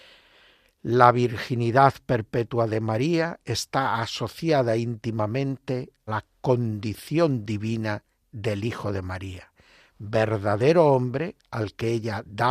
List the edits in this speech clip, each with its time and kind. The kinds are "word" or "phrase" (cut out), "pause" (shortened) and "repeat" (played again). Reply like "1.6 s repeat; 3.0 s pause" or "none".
6.1 s word